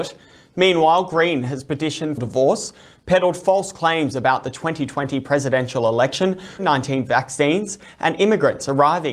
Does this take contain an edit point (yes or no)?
yes